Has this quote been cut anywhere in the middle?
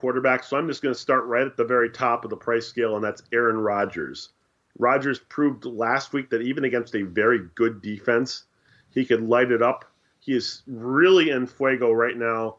no; 0 cuts

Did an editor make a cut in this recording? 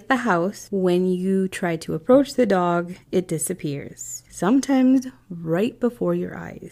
yes; 1 cut; at 3.0 s

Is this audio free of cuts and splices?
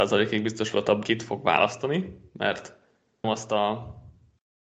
no; 2 cuts; at 1.0 s, 3.2 s

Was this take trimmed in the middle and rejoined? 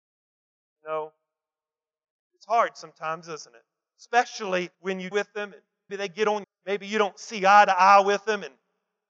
yes; 4 cuts; at 4.7 s, 5.1 s, 5.9 s, 6.4 s

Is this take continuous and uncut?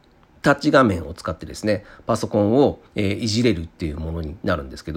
no; 1 cut; at 2.9 s

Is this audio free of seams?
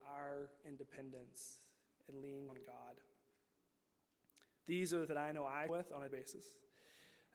no; 4 cuts; at 2.5 s, 5.1 s, 5.7 s, 6.1 s

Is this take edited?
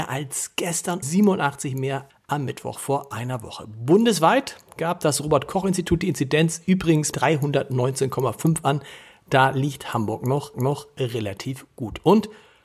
yes; 4 cuts; at 1.0 s, 2.1 s, 7.1 s, 10.5 s

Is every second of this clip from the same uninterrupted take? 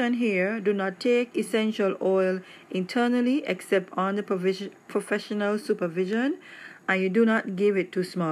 yes; 0 cuts

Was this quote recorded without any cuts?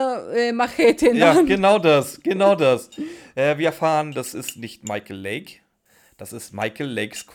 yes; 0 cuts

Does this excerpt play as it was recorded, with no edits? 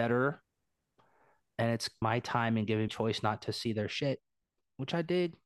no; 2 cuts; at 2.0 s, 2.9 s

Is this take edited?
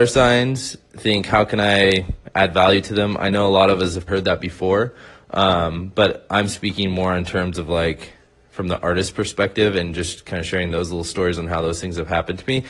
yes; 1 cut; at 4.1 s

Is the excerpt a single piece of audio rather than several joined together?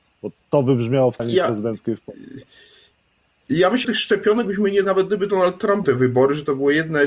no; 4 cuts; at 1.2 s, 3.8 s, 4.8 s, 5.8 s

